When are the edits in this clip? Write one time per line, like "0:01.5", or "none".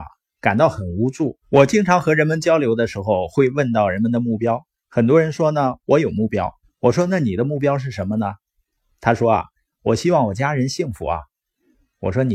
0:01.4
0:06.6